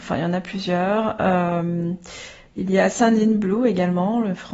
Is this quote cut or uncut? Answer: uncut